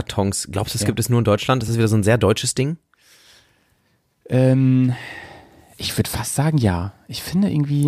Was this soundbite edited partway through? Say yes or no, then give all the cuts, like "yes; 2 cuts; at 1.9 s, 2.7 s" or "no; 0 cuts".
no; 0 cuts